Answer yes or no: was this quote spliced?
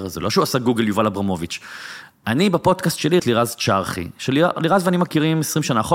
yes